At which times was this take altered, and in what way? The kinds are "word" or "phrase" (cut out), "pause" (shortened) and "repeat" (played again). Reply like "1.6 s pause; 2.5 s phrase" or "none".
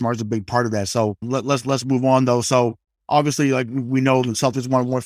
none

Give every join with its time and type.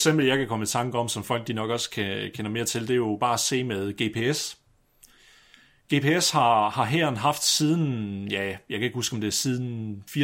none

